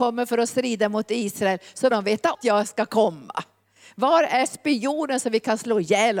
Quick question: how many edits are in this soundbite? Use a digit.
2